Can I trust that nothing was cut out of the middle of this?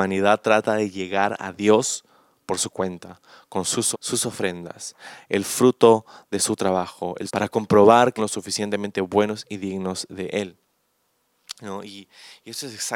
no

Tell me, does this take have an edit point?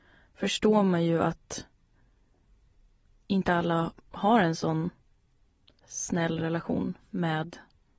no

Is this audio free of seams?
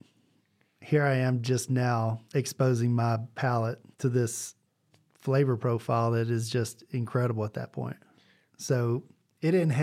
no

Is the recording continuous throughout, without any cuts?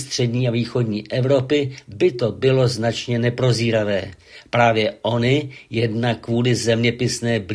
yes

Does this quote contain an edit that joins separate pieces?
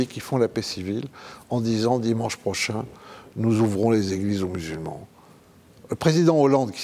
no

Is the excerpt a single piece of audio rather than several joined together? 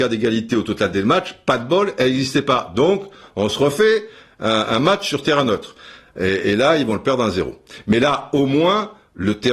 yes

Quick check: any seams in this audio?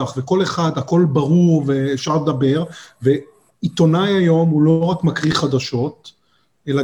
no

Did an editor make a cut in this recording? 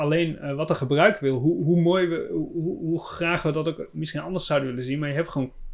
no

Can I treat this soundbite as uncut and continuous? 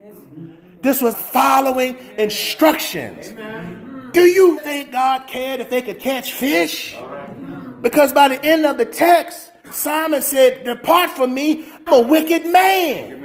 no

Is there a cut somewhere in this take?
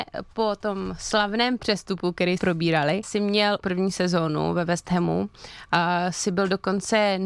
yes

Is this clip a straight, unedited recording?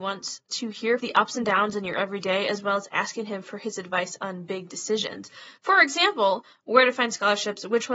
no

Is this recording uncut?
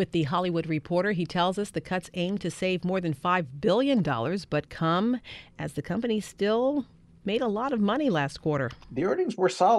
yes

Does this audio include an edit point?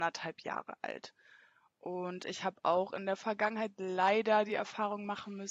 no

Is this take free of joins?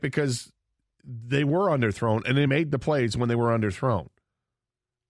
yes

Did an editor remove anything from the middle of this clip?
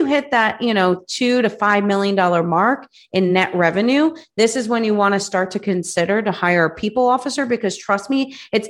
no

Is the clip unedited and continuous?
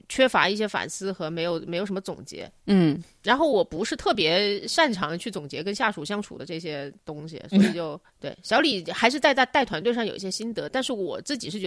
no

